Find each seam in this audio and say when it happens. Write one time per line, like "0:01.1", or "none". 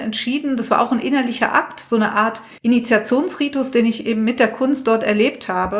0:02.6